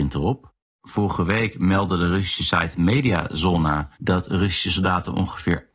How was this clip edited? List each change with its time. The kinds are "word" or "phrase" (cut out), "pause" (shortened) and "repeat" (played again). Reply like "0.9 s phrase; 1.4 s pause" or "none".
3.9 s pause